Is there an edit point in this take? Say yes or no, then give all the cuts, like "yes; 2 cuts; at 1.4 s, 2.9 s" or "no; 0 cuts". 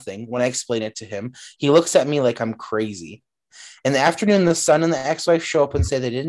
no; 0 cuts